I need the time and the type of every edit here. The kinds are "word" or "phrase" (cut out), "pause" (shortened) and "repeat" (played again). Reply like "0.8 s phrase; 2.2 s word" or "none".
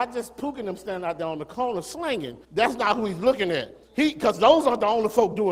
2.4 s pause; 3.8 s pause